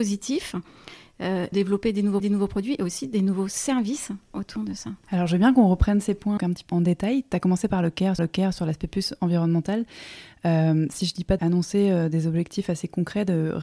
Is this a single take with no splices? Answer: no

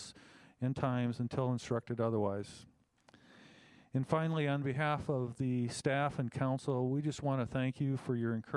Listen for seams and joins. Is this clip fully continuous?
yes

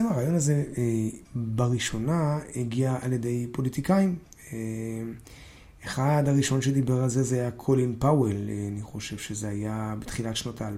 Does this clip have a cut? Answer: no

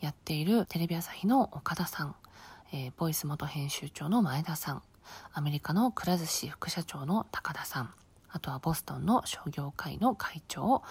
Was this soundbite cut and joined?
no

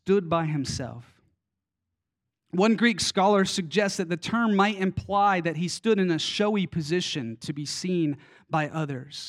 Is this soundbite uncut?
yes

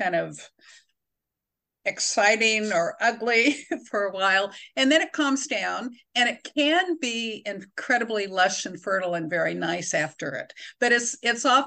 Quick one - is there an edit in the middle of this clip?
no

